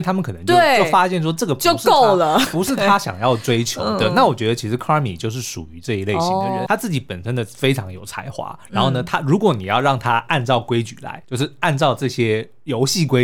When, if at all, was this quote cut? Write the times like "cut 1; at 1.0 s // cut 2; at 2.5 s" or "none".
cut 1; at 2.5 s // cut 2; at 6.7 s // cut 3; at 11.2 s